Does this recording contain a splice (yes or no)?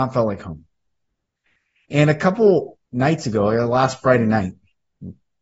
yes